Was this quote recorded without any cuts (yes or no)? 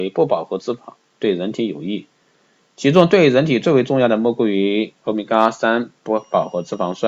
yes